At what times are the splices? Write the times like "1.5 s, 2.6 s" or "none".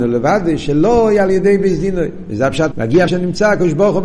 2.7 s, 3.1 s